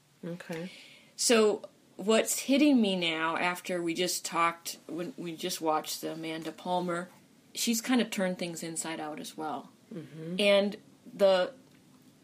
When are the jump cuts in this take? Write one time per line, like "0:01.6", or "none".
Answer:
none